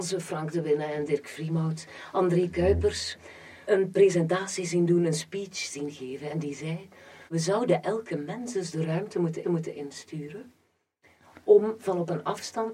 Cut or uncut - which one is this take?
cut